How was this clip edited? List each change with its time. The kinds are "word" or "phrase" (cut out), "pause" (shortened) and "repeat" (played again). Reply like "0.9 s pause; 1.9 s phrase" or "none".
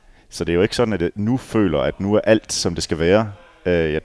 none